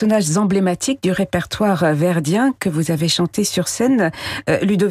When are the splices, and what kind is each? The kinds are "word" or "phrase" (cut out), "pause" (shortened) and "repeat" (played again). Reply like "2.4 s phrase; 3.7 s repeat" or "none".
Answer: none